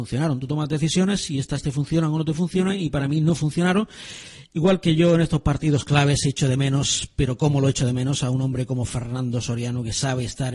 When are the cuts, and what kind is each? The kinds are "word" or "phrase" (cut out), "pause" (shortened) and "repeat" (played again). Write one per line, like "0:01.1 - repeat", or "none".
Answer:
none